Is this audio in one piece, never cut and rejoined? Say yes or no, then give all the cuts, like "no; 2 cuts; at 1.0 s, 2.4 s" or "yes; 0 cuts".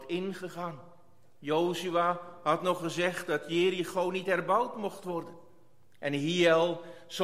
yes; 0 cuts